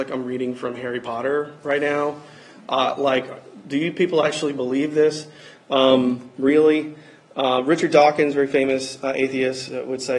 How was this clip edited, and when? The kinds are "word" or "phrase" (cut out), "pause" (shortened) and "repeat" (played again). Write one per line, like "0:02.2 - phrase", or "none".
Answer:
none